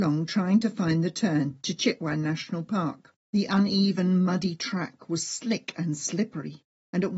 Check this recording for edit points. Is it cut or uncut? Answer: cut